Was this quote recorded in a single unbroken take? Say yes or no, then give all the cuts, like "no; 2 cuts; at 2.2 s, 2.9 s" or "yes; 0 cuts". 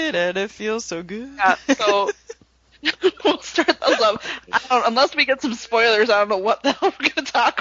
yes; 0 cuts